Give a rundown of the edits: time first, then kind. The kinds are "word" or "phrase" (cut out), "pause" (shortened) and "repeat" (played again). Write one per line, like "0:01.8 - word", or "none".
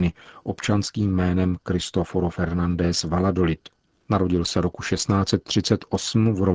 none